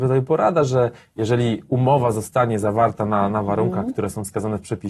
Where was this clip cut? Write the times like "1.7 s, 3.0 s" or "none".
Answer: none